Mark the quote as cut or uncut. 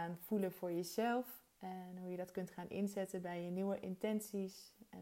cut